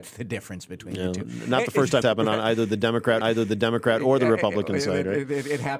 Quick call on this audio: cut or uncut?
cut